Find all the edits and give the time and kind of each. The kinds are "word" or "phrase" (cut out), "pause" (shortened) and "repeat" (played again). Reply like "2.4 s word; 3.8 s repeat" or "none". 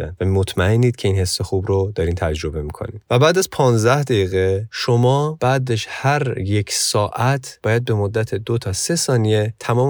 none